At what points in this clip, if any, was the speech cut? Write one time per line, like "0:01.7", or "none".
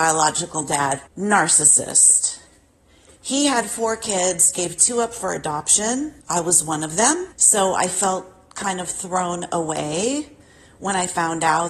0:01.1
0:06.2
0:07.3